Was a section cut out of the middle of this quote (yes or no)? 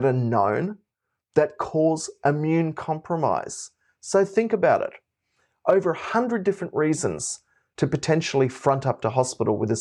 no